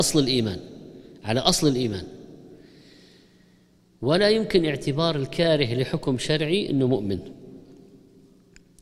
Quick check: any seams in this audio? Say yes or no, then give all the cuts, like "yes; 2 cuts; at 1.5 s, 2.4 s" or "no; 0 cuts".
no; 0 cuts